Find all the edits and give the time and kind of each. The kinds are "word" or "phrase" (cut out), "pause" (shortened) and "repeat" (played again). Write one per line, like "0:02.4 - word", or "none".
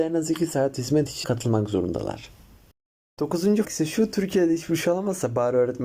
0:01.2 - word
0:03.6 - word